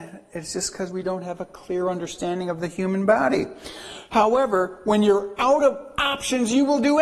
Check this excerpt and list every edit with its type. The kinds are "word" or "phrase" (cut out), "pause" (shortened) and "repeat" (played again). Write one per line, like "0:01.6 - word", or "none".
none